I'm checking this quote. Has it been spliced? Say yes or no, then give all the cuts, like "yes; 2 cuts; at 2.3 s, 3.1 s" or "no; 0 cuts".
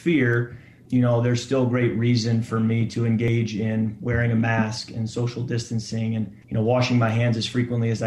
yes; 1 cut; at 6.4 s